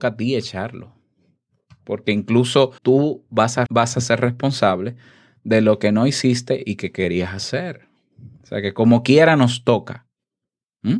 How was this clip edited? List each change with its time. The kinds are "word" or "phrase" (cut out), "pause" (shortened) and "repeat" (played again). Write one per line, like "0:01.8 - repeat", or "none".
0:02.8 - pause
0:03.7 - word